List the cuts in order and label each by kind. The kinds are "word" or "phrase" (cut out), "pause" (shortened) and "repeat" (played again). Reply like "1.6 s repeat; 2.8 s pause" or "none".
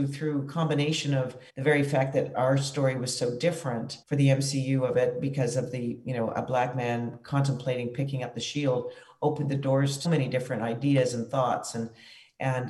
1.5 s pause; 4.0 s pause; 10.0 s word